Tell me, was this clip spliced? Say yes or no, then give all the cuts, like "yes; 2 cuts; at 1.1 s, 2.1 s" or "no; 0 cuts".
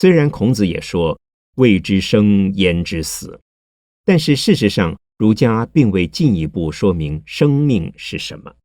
no; 0 cuts